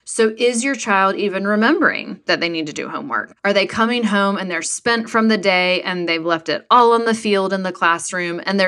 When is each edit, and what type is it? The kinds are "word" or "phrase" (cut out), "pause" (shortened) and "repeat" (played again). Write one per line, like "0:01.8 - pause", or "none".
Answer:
0:03.4 - pause